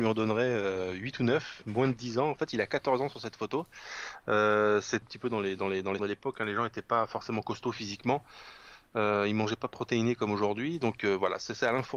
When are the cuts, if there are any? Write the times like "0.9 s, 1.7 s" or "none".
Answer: 5.0 s, 6.0 s